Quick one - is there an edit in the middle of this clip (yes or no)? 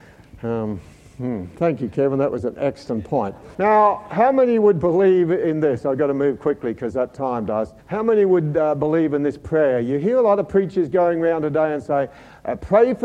yes